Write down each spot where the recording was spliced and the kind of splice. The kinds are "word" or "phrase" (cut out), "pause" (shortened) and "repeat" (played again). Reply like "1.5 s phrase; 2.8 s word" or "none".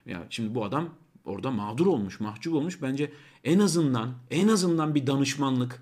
none